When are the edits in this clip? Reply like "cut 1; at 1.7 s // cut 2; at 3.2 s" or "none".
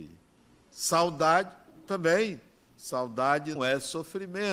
cut 1; at 3.6 s